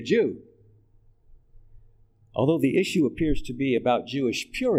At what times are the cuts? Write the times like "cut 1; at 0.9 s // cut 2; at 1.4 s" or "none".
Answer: none